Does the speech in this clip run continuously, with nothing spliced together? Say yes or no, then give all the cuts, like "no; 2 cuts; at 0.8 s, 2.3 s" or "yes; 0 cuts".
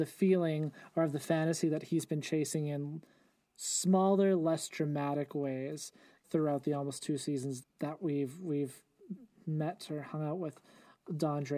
no; 2 cuts; at 6.2 s, 7.6 s